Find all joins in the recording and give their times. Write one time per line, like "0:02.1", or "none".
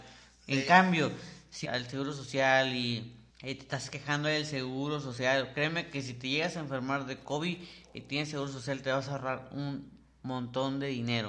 0:01.6
0:03.3